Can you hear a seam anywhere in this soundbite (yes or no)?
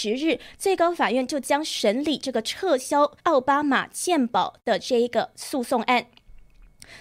yes